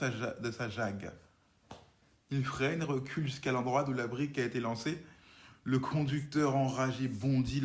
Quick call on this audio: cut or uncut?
uncut